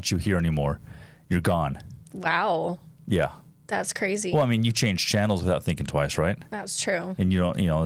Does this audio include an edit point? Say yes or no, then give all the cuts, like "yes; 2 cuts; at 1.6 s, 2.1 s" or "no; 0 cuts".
no; 0 cuts